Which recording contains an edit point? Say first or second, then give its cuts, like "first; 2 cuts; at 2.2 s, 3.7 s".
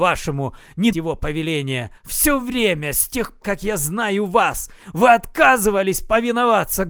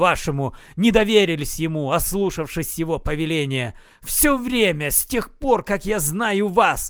first; 3 cuts; at 0.9 s, 2.0 s, 3.4 s